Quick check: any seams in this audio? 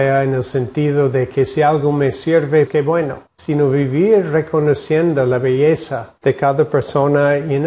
yes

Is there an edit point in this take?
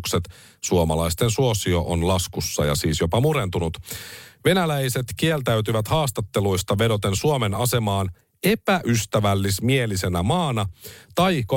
no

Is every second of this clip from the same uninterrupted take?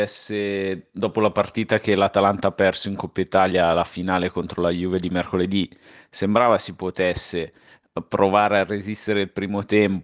yes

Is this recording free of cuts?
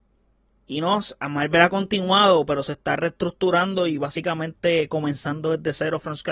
yes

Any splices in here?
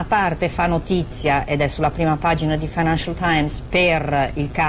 no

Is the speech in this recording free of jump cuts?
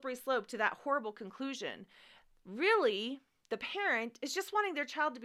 yes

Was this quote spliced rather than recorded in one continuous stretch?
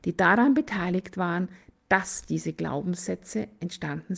no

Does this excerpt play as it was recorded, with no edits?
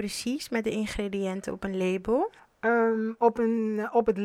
no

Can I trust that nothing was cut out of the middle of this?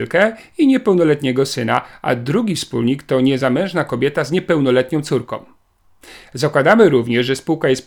yes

